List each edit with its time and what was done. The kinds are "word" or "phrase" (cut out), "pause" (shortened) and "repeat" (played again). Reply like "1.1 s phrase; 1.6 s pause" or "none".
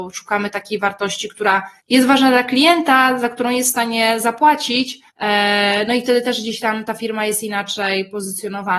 1.8 s pause; 5.1 s pause